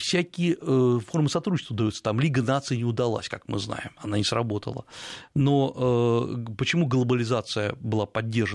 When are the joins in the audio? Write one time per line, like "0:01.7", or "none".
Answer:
none